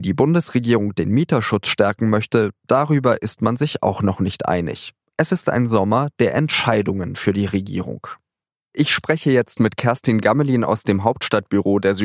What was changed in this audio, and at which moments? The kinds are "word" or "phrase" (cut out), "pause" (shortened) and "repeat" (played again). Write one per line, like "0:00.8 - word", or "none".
none